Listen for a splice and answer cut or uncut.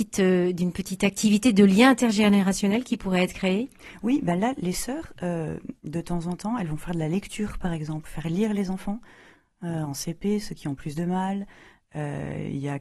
uncut